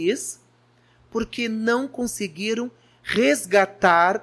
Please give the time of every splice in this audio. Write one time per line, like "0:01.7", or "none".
none